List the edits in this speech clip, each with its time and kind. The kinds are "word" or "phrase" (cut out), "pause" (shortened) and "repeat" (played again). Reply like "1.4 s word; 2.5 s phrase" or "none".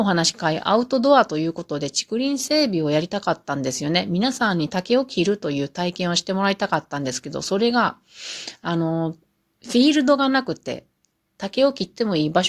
none